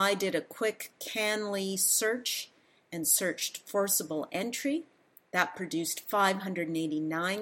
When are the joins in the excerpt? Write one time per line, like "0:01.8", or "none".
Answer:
none